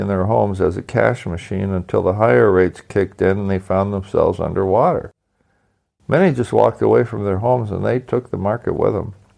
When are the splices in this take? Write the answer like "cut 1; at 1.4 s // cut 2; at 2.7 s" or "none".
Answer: none